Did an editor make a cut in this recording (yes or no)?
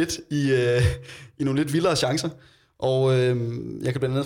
no